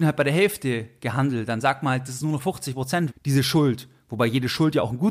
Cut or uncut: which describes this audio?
cut